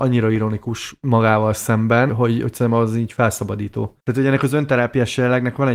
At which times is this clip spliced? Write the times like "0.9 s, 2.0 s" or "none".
2.1 s, 4.0 s